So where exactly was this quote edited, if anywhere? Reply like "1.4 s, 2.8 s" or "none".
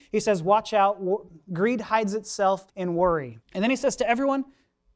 2.7 s, 3.4 s

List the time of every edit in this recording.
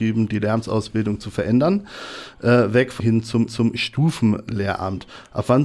3.0 s, 3.5 s

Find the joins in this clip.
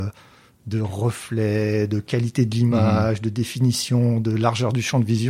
none

